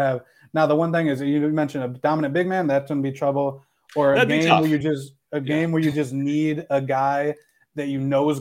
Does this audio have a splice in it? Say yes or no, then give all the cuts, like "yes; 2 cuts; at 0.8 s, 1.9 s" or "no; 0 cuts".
no; 0 cuts